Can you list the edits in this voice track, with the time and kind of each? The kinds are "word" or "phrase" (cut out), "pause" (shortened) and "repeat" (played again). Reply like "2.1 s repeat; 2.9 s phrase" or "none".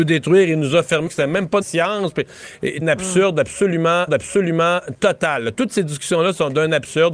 1.1 s word; 1.6 s phrase; 2.8 s phrase; 4.1 s repeat

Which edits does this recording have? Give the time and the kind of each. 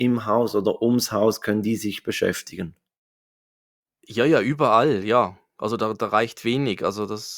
none

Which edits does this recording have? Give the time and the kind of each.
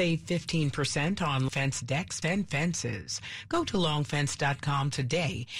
1.5 s word; 2.2 s word

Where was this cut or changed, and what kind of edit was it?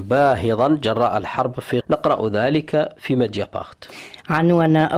1.8 s word

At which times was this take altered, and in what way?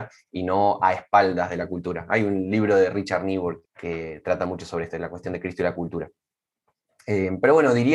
3.6 s word

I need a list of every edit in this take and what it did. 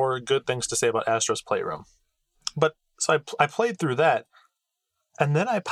none

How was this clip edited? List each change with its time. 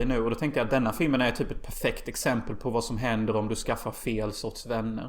none

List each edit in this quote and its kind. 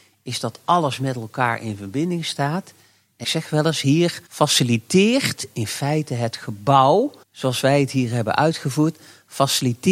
3.2 s word; 4.3 s pause; 7.2 s pause

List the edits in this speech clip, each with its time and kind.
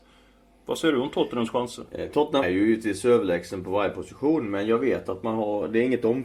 2.4 s word

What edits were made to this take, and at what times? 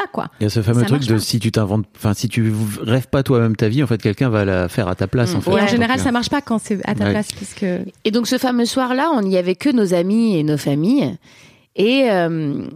none

